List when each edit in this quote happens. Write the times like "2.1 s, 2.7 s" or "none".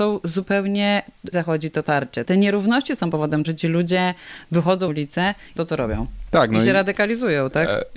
1.3 s, 2.3 s, 3.4 s, 4.9 s, 5.6 s